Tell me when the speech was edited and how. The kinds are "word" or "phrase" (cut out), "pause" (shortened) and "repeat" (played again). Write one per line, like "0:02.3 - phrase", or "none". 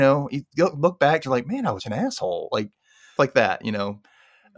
0:01.2 - word
0:01.8 - word
0:03.2 - word